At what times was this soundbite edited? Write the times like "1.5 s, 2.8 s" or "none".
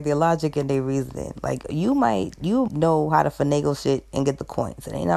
2.7 s